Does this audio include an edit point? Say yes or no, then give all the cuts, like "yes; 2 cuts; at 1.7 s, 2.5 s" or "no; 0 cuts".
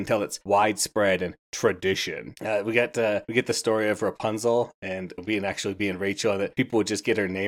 yes; 1 cut; at 5.2 s